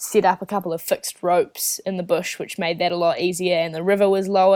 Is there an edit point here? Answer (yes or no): no